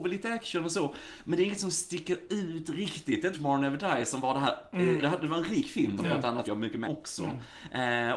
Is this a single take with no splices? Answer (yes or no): no